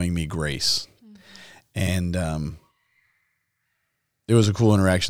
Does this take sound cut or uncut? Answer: uncut